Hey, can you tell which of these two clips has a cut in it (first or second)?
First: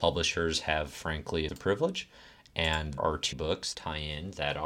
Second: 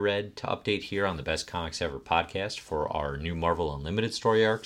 first